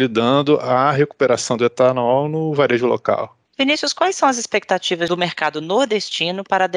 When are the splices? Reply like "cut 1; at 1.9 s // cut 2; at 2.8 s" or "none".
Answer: cut 1; at 3.4 s